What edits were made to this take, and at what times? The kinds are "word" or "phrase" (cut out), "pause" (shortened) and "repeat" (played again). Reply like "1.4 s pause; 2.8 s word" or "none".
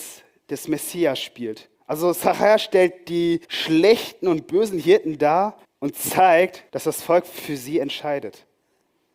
1.7 s pause; 3.4 s pause; 5.6 s pause; 6.7 s pause